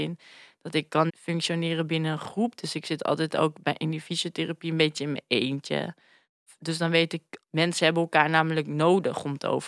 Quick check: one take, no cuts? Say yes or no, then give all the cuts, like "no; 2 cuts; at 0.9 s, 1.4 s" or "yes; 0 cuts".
no; 1 cut; at 1.1 s